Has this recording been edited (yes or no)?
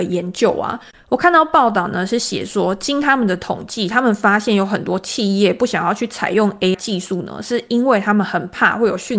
yes